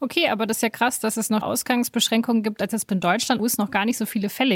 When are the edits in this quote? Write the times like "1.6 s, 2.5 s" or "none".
1.4 s, 2.9 s, 3.4 s